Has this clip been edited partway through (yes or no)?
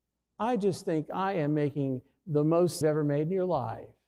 yes